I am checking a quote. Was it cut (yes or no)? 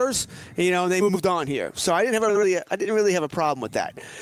no